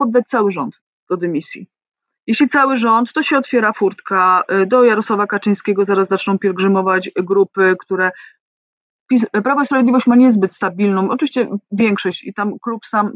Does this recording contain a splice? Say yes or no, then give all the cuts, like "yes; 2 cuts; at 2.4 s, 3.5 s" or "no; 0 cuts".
no; 0 cuts